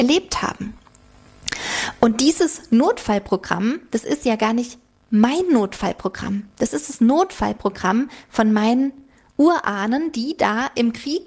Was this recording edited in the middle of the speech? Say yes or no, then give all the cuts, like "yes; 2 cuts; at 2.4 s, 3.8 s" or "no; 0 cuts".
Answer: no; 0 cuts